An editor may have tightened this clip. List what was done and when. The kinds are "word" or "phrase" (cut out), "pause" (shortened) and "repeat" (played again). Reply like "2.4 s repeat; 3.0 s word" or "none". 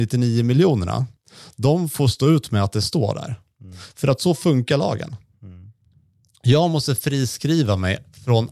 none